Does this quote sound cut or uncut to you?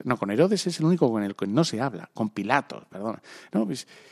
uncut